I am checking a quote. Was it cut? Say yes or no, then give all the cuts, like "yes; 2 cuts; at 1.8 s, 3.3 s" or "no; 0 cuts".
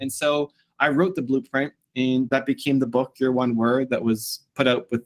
no; 0 cuts